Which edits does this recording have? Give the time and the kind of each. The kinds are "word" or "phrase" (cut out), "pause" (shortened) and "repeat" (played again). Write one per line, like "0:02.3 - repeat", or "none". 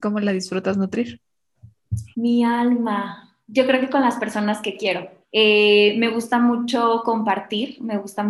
0:02.1 - pause
0:03.4 - pause
0:05.2 - pause